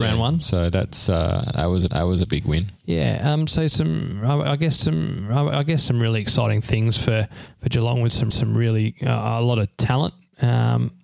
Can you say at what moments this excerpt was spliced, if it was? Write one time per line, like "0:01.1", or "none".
0:01.9
0:04.8
0:08.3